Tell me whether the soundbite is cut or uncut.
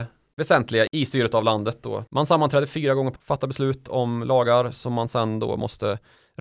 cut